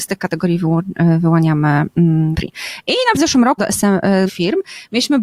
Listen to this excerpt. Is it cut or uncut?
cut